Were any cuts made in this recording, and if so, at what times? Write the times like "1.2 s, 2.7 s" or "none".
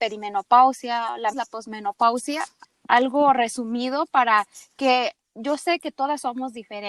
1.3 s